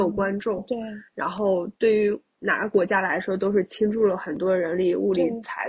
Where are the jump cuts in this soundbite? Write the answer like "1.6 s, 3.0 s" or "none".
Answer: none